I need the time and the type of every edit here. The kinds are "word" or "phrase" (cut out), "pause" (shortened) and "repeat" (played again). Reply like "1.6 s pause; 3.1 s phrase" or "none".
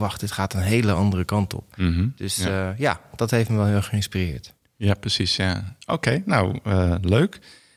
4.6 s pause